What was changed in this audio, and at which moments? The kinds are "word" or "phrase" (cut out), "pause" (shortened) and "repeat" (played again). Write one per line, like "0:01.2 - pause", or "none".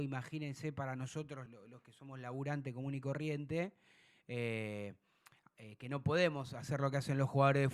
0:01.5 - word